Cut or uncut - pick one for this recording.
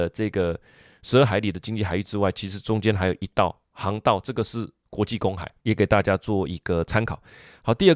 cut